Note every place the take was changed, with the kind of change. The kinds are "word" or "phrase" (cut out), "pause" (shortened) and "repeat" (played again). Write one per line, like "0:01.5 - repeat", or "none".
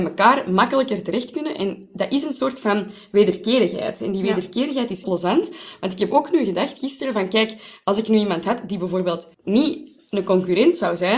0:05.0 - word
0:09.3 - pause